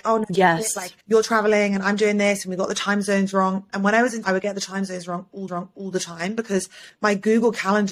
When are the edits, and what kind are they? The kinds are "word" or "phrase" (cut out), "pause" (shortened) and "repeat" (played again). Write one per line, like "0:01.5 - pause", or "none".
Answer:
0:01.0 - pause
0:04.2 - word
0:05.5 - repeat